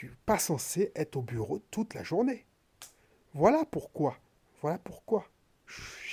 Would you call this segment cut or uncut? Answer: uncut